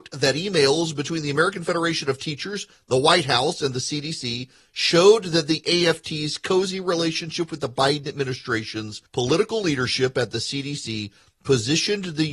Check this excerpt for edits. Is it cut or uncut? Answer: cut